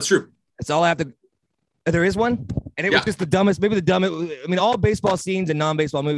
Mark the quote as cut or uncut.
uncut